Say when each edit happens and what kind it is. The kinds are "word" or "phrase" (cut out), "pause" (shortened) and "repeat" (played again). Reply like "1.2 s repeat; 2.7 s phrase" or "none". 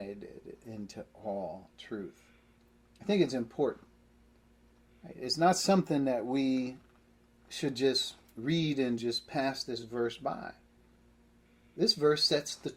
none